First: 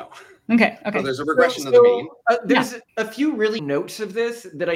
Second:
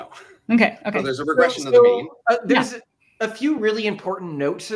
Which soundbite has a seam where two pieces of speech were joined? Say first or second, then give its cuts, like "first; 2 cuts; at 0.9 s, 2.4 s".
first; 2 cuts; at 2.9 s, 3.6 s